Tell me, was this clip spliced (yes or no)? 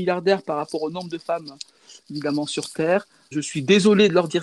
yes